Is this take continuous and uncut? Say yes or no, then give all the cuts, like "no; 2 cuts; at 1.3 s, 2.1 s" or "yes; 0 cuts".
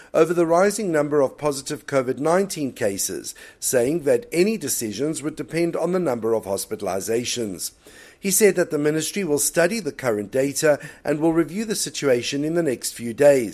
yes; 0 cuts